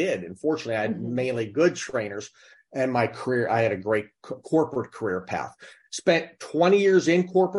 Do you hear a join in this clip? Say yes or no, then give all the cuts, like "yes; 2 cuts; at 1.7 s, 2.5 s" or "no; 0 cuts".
no; 0 cuts